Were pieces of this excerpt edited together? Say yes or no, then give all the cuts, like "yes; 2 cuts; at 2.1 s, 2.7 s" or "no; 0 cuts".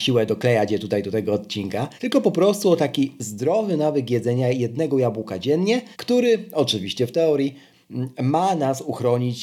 yes; 2 cuts; at 2.0 s, 5.9 s